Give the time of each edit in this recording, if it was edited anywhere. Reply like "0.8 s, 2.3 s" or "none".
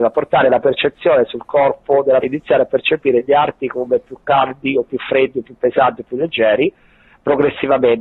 2.2 s

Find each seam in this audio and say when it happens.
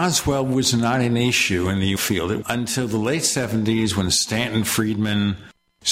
2.0 s, 2.4 s

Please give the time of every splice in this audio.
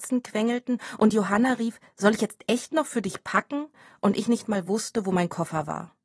none

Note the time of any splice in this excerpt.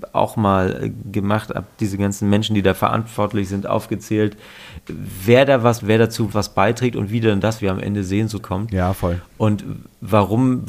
5.8 s, 6.3 s, 7.6 s, 8.4 s

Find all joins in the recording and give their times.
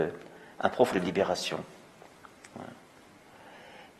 0.9 s

